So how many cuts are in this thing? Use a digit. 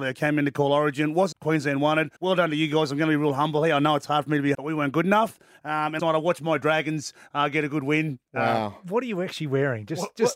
4